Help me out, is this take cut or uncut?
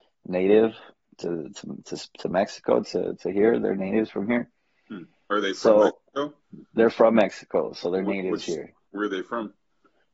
uncut